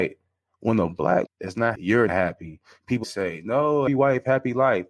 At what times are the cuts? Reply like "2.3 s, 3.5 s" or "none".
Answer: 1.3 s, 1.7 s, 2.1 s, 3.0 s, 3.9 s